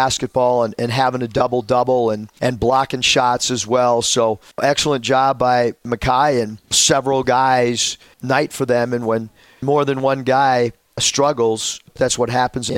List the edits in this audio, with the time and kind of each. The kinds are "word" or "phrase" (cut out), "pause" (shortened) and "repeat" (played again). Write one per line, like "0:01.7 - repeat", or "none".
0:08.1 - phrase